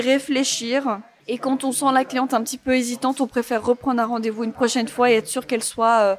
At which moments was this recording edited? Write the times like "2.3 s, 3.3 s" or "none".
none